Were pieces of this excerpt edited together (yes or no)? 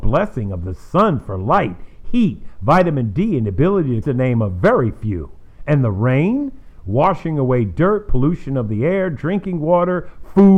yes